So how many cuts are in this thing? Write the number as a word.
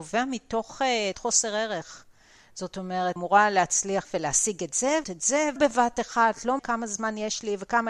six